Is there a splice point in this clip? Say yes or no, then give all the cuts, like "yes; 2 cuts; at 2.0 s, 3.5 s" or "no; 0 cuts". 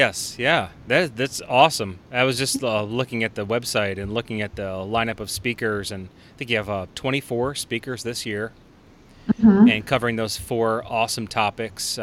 no; 0 cuts